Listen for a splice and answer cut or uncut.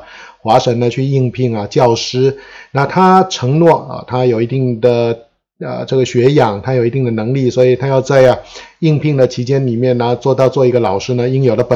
uncut